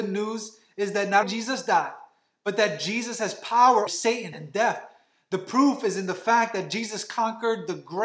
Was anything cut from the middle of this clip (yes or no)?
yes